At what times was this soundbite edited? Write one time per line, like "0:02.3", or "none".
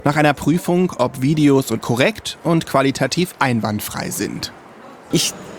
0:01.8